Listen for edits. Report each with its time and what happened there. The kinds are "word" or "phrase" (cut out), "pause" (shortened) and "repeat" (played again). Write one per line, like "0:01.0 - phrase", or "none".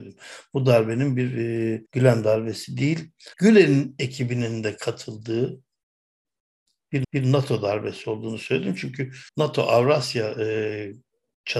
0:01.9 - pause
0:03.3 - pause
0:07.0 - repeat
0:09.3 - pause